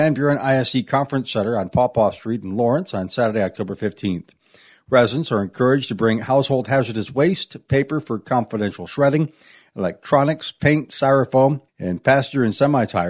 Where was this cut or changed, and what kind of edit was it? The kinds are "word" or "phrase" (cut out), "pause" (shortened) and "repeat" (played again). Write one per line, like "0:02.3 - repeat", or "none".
0:11.7 - pause